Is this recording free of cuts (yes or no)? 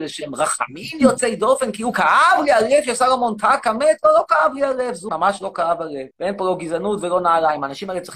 no